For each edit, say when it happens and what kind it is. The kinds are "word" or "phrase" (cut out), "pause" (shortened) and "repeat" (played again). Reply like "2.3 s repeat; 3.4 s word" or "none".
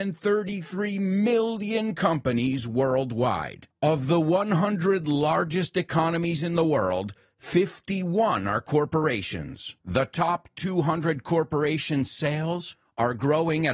none